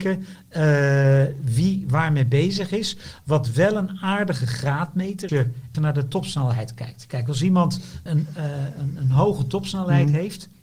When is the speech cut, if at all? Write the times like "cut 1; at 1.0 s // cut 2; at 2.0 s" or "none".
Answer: cut 1; at 5.3 s // cut 2; at 5.7 s // cut 3; at 8.1 s